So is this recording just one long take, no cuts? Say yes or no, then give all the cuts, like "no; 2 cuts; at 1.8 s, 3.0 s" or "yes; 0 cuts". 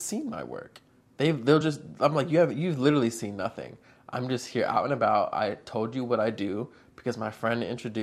yes; 0 cuts